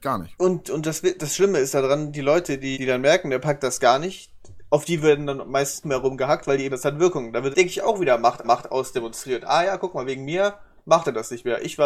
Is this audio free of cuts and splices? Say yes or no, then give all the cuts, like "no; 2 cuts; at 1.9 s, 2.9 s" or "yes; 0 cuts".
no; 5 cuts; at 2.7 s, 5.8 s, 6.7 s, 7.5 s, 8.4 s